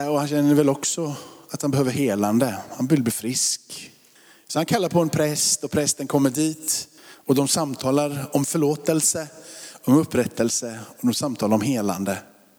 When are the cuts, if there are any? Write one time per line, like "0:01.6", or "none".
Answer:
0:04.2
0:07.0